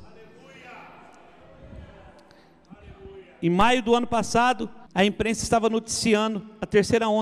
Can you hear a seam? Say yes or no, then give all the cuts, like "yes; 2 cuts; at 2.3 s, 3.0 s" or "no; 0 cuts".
yes; 1 cut; at 4.9 s